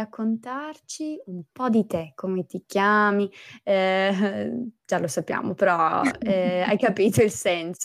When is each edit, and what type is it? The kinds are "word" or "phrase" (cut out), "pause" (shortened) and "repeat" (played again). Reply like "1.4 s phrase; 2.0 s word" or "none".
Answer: 4.8 s pause